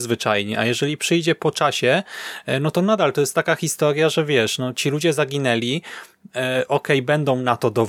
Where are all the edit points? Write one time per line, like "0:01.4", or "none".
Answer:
none